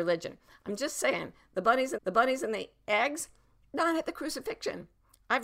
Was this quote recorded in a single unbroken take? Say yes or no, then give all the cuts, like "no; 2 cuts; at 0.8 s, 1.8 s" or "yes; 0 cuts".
no; 1 cut; at 2.0 s